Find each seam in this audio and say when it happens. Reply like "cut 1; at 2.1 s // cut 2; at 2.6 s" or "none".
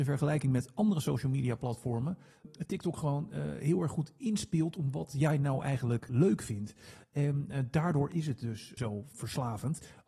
none